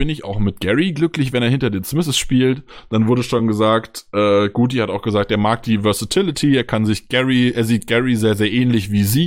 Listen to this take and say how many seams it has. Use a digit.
0